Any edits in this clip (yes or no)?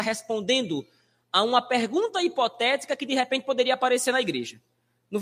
no